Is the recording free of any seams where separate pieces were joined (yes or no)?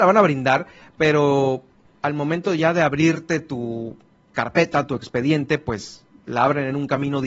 yes